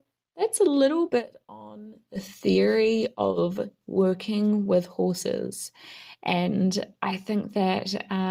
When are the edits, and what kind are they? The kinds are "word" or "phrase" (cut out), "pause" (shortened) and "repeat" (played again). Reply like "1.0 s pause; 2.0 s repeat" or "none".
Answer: none